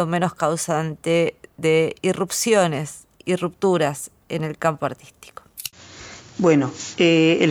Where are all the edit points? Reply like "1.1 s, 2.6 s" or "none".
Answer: none